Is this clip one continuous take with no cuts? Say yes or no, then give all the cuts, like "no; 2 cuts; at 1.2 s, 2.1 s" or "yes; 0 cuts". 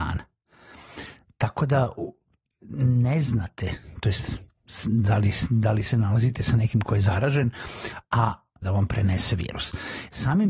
no; 1 cut; at 8.6 s